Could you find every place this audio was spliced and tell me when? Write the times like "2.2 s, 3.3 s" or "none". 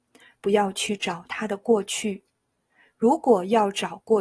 none